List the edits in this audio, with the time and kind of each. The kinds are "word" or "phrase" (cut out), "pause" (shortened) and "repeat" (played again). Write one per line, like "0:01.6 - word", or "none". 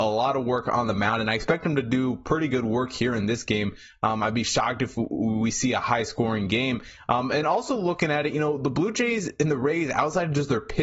none